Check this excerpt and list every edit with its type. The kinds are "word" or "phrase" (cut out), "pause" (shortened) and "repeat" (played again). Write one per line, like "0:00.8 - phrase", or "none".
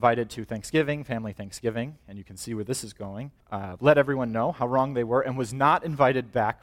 0:03.4 - pause

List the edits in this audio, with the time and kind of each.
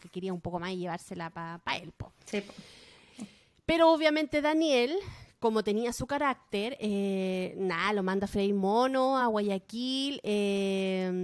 none

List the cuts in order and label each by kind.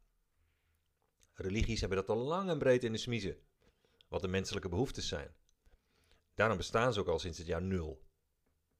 none

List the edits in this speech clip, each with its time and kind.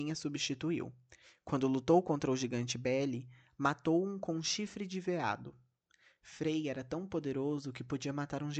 none

